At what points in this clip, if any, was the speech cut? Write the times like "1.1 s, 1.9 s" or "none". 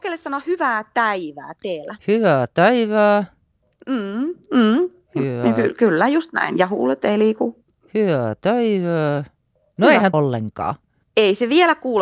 2.0 s, 10.1 s